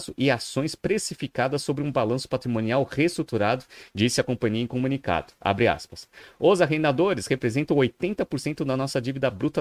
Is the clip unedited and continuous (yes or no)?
yes